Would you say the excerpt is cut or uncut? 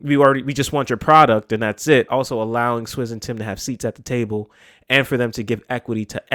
cut